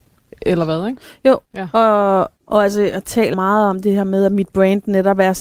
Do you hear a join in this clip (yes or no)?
yes